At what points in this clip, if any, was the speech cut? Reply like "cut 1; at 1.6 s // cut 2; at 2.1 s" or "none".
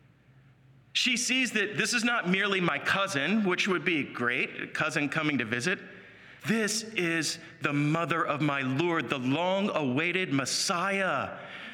cut 1; at 6.4 s